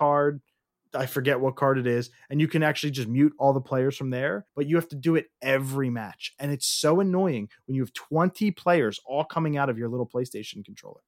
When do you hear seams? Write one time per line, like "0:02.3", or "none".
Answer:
0:04.5